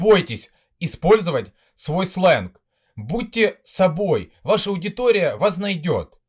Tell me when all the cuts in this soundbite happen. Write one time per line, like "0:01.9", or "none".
none